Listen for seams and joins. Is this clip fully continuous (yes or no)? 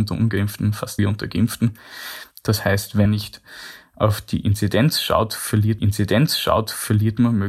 no